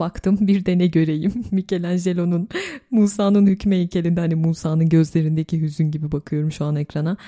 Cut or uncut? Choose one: uncut